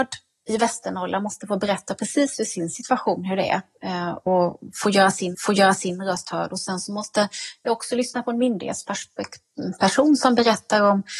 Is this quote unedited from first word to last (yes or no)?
no